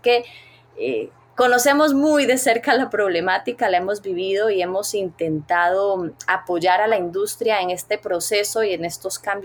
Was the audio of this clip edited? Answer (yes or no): no